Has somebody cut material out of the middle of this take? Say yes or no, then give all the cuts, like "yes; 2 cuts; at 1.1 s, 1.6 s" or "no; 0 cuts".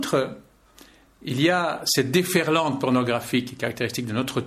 no; 0 cuts